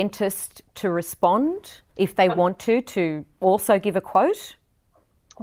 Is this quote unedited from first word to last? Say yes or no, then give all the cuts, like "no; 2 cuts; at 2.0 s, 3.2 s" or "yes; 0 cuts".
no; 1 cut; at 1.9 s